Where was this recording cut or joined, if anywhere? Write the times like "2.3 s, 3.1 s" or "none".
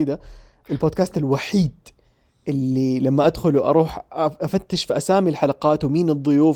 none